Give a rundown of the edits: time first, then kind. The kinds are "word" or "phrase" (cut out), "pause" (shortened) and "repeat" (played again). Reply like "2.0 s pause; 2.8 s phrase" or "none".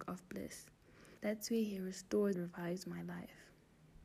1.2 s pause; 2.3 s word